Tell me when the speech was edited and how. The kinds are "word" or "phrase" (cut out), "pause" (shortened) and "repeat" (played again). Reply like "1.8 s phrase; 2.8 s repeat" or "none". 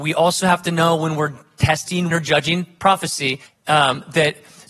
2.1 s word; 3.5 s pause